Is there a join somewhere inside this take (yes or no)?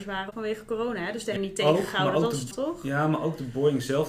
yes